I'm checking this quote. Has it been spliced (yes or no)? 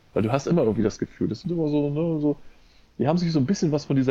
no